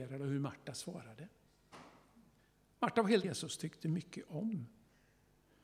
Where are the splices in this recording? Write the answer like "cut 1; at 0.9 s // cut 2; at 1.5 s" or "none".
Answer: cut 1; at 2.4 s // cut 2; at 3.2 s